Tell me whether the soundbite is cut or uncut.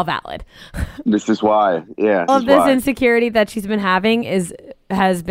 cut